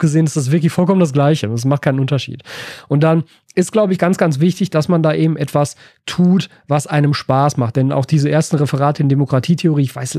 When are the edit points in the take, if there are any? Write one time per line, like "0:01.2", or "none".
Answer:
none